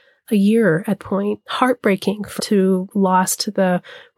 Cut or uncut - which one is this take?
cut